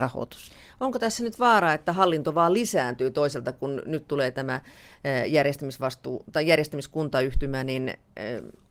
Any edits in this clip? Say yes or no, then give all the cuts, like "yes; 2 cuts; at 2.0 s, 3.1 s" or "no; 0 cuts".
no; 0 cuts